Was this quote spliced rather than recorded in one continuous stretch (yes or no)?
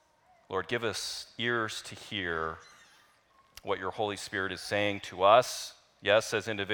no